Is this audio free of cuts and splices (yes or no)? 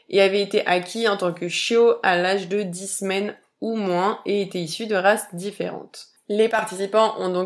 yes